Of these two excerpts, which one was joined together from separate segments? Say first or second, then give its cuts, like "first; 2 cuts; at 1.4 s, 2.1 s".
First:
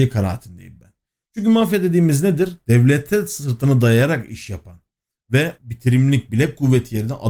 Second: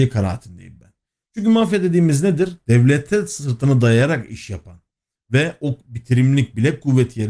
first; 1 cut; at 5.6 s